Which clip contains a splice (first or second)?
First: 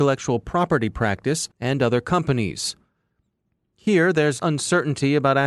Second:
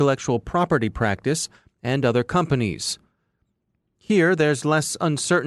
first